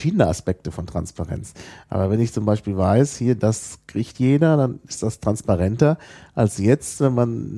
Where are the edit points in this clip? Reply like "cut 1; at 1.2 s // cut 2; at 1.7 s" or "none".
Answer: none